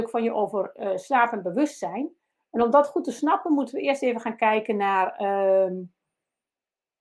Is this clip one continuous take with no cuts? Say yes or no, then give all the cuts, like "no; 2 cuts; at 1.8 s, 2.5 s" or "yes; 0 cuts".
yes; 0 cuts